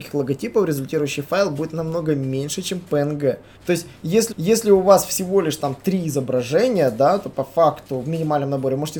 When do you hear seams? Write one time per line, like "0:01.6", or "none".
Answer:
0:03.6
0:04.3

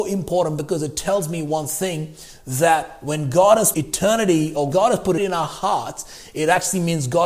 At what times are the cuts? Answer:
0:03.7
0:04.7
0:05.2

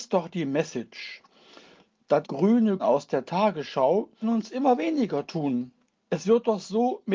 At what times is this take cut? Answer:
0:02.2
0:02.8
0:04.2

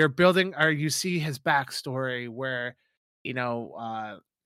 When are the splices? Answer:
none

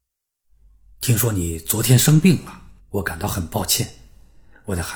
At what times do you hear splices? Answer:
0:02.8

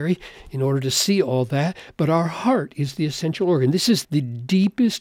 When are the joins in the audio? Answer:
0:04.0

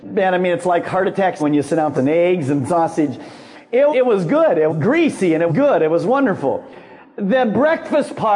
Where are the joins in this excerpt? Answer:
0:01.4
0:02.0
0:03.9
0:04.7
0:05.5

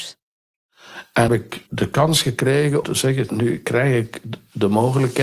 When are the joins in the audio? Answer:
0:01.3
0:01.7
0:02.8
0:03.3

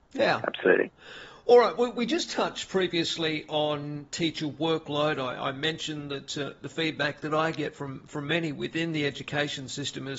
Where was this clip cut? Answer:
none

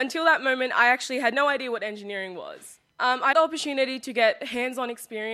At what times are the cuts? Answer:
0:02.9
0:03.3

